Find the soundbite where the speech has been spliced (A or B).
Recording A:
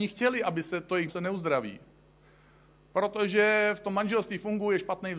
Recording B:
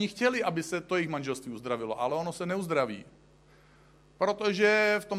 A